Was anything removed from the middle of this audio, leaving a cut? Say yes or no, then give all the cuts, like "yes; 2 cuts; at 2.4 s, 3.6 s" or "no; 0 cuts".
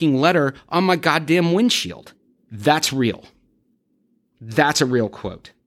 no; 0 cuts